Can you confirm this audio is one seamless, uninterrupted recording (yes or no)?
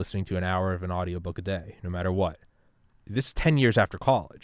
yes